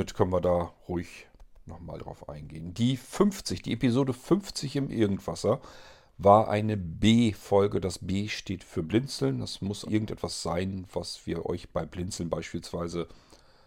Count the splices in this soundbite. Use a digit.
2